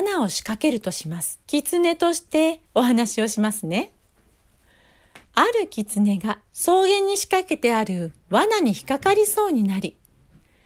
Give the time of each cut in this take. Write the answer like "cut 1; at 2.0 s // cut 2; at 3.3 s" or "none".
cut 1; at 1.4 s // cut 2; at 2.7 s // cut 3; at 5.2 s // cut 4; at 6.5 s // cut 5; at 8.2 s